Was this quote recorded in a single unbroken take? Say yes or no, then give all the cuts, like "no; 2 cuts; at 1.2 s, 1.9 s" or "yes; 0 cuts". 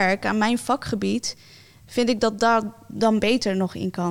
yes; 0 cuts